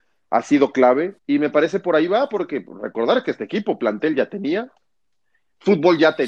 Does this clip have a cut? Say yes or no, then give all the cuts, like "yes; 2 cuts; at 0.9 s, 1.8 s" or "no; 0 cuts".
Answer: yes; 1 cut; at 1.2 s